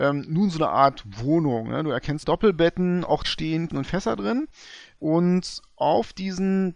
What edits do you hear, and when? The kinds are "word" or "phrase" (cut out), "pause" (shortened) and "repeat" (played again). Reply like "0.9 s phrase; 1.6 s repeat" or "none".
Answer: 2.2 s word; 3.2 s word; 3.7 s word